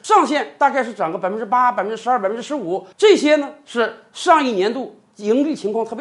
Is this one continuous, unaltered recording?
no; 1 cut; at 2.9 s

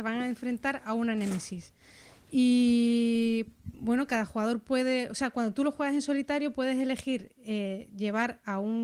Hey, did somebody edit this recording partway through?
no; 0 cuts

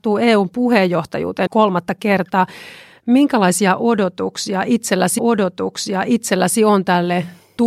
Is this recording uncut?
no; 2 cuts; at 1.5 s, 5.2 s

